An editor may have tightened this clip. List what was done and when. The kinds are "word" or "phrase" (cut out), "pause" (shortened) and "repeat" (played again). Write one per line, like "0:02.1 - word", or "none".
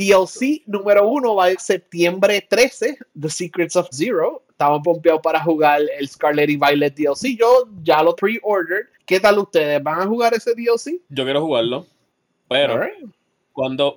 0:01.6 - word
0:03.9 - word
0:04.8 - word
0:08.2 - word
0:08.9 - pause
0:11.0 - pause